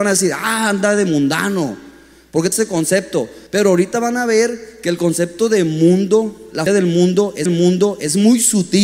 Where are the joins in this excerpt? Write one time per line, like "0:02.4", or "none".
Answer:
0:02.5
0:03.5
0:06.7
0:07.5